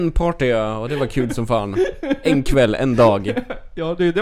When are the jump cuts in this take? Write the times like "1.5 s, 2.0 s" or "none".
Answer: none